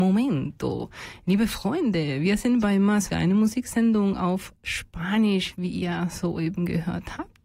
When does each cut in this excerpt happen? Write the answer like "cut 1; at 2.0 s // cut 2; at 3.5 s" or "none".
cut 1; at 3.1 s

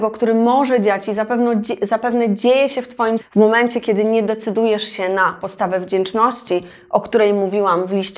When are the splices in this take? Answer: cut 1; at 3.2 s

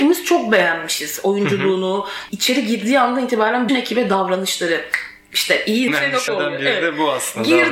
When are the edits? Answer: cut 1; at 2.3 s // cut 2; at 3.7 s // cut 3; at 5.9 s // cut 4; at 6.3 s

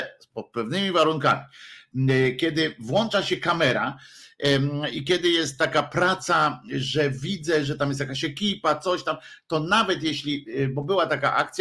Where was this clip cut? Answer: none

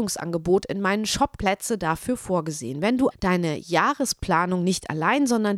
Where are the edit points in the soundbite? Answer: cut 1; at 1.4 s // cut 2; at 3.1 s

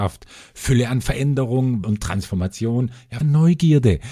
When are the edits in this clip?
cut 1; at 1.8 s // cut 2; at 3.2 s

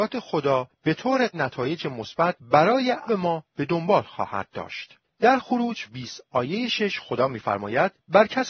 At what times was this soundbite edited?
cut 1; at 1.3 s // cut 2; at 3.1 s // cut 3; at 5.9 s

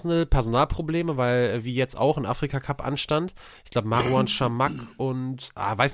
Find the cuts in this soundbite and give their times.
none

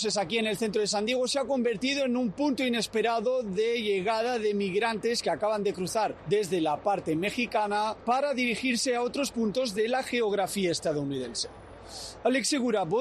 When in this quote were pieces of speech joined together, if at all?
none

